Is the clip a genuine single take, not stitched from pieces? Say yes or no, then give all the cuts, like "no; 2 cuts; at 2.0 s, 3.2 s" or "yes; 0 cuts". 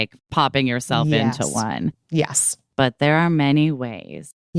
yes; 0 cuts